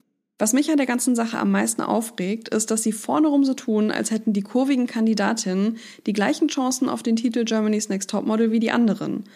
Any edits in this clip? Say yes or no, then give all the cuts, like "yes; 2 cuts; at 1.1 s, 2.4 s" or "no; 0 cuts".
no; 0 cuts